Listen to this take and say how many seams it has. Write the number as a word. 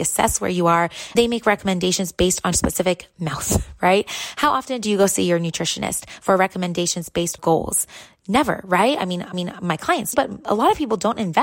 five